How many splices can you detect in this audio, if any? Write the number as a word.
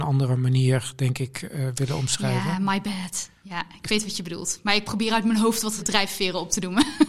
one